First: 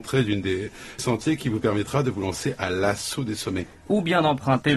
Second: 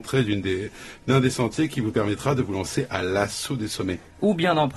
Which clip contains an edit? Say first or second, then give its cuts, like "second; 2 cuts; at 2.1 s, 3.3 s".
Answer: first; 1 cut; at 1.0 s